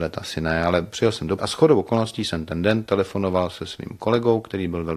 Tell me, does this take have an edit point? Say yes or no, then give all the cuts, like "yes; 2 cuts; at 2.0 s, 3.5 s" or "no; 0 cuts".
yes; 1 cut; at 1.4 s